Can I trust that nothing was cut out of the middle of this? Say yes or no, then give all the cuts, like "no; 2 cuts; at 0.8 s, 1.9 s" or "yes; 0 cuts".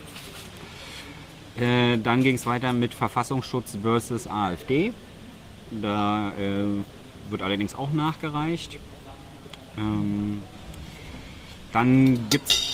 yes; 0 cuts